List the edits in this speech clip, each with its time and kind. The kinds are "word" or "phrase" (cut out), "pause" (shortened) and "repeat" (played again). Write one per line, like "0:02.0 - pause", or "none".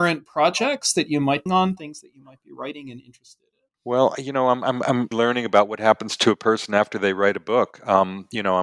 0:01.5 - phrase
0:03.7 - pause
0:05.1 - word